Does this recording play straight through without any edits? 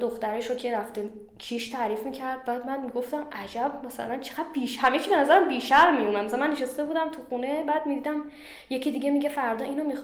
yes; 0 cuts

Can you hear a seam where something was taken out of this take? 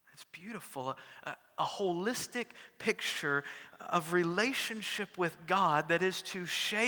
no; 0 cuts

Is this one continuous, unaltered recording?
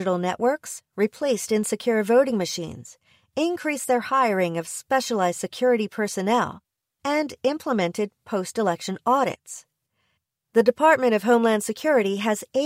yes; 0 cuts

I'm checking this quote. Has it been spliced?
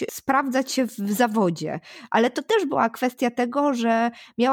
no; 0 cuts

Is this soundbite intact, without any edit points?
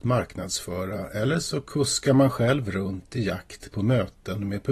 yes; 0 cuts

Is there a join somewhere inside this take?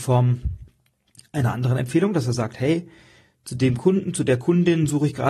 no; 0 cuts

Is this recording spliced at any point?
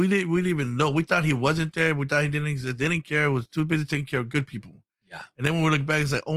no; 0 cuts

